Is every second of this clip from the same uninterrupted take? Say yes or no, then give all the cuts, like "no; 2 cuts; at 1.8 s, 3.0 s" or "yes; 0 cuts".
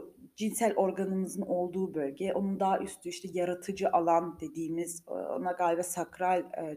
yes; 0 cuts